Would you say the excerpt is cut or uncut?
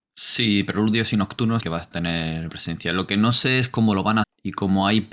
cut